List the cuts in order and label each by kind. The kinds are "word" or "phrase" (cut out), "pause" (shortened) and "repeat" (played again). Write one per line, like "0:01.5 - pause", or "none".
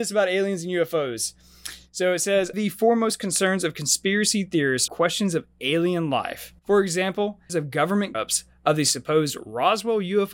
0:02.5 - word
0:04.9 - word
0:06.6 - pause
0:07.5 - word
0:08.1 - word